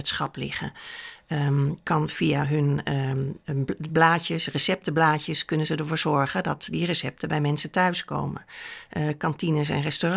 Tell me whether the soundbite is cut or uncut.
uncut